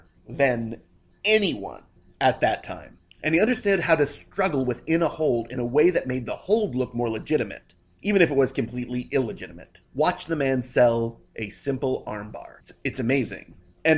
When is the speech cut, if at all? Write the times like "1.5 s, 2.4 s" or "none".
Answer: 9.8 s, 11.3 s